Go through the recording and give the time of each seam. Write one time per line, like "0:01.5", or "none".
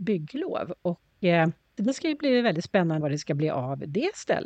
0:03.0